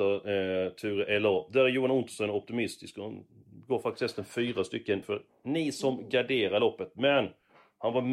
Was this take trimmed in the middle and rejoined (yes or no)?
yes